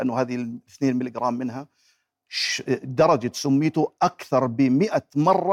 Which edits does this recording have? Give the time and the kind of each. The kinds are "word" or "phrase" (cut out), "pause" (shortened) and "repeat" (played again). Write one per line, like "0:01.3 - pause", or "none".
none